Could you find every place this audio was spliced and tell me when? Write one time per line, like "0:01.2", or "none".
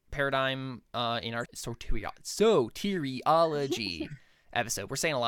0:01.5